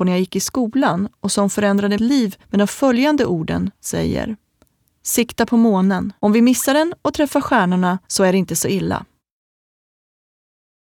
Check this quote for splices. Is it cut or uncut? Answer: cut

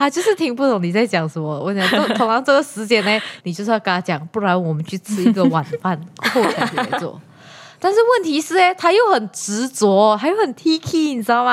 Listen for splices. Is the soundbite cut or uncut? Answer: uncut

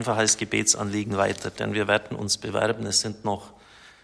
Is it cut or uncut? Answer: uncut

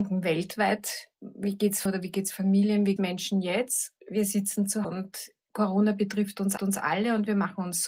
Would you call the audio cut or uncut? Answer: cut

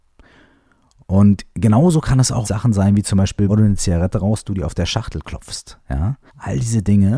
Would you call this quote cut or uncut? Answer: cut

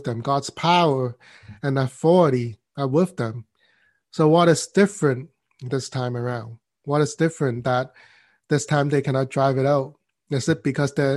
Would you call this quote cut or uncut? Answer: uncut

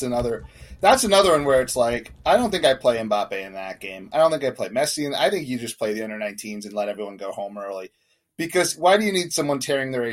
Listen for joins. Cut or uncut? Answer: uncut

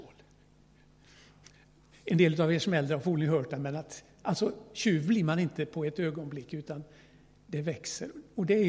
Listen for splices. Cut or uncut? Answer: uncut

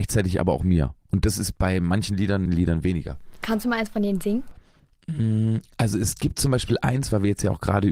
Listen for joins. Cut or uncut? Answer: cut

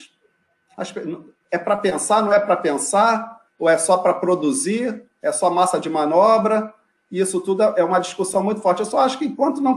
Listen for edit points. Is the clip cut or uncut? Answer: cut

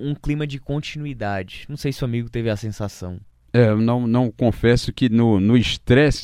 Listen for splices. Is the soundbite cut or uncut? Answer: uncut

